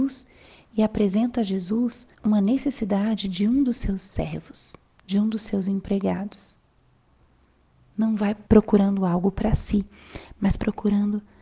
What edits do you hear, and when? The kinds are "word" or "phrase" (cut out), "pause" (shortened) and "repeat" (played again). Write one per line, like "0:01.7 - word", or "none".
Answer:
0:02.1 - pause
0:08.5 - pause